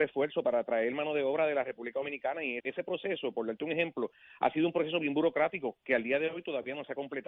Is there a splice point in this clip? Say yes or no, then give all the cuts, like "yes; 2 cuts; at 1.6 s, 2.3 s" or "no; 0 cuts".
yes; 1 cut; at 2.6 s